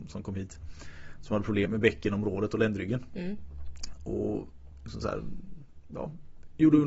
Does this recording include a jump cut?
yes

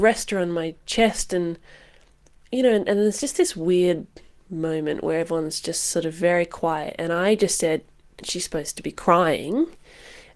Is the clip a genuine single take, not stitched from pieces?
no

